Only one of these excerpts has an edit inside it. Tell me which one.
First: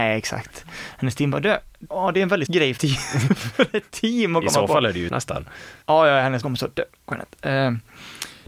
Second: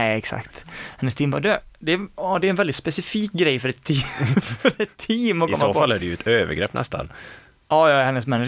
first; 6 cuts; at 1.8 s, 2.5 s, 2.8 s, 5.1 s, 5.8 s, 6.4 s

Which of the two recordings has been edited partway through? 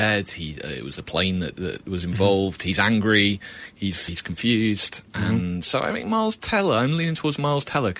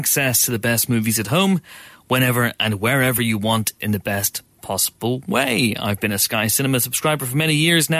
first; 2 cuts; at 1.5 s, 4.1 s

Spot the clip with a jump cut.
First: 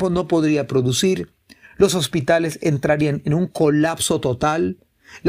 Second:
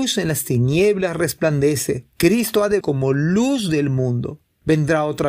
second; 2 cuts; at 2.1 s, 2.8 s

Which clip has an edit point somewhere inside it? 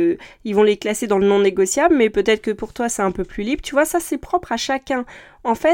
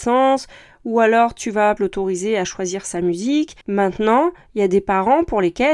second; 2 cuts; at 1.8 s, 3.6 s

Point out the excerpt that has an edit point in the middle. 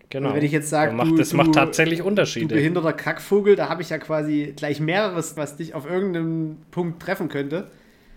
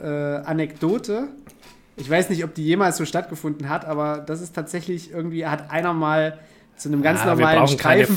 first; 1 cut; at 5.4 s

